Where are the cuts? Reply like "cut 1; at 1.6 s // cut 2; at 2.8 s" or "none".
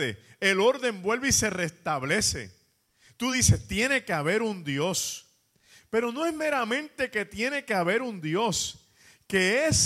none

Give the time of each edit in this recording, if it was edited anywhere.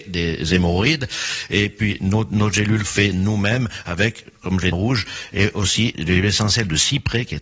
cut 1; at 2.8 s // cut 2; at 4.7 s // cut 3; at 5.9 s

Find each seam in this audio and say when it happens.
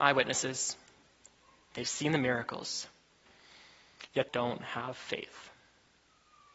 cut 1; at 4.3 s

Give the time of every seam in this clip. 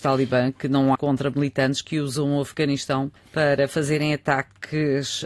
cut 1; at 1.0 s // cut 2; at 3.2 s

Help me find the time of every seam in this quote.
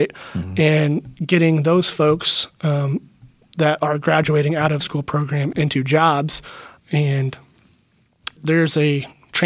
cut 1; at 4.8 s // cut 2; at 5.5 s // cut 3; at 8.4 s

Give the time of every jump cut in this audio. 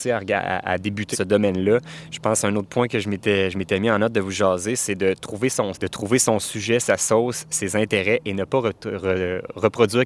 cut 1; at 1.1 s // cut 2; at 5.7 s

